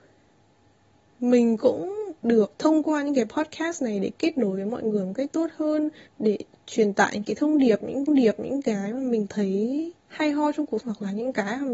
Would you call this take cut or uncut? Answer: cut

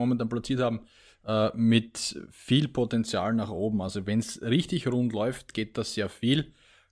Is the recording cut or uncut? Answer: uncut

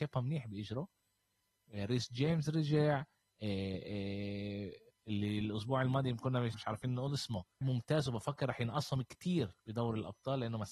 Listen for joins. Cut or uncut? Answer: cut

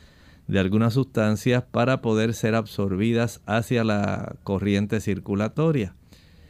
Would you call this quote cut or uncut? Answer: uncut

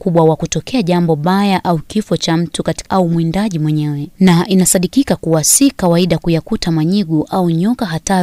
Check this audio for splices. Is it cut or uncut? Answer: cut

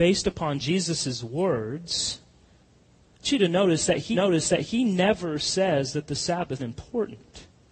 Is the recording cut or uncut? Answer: cut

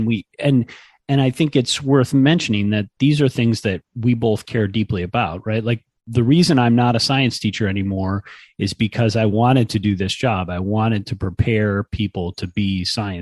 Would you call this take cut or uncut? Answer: uncut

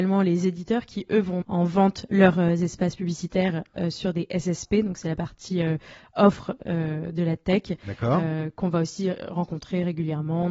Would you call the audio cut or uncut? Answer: cut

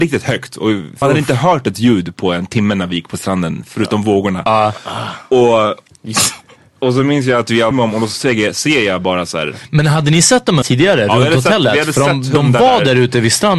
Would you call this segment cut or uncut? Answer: cut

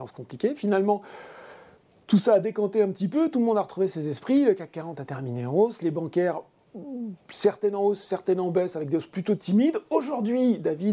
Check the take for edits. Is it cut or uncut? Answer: uncut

